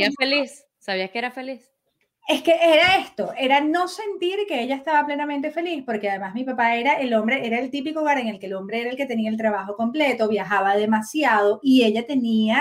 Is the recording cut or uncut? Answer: uncut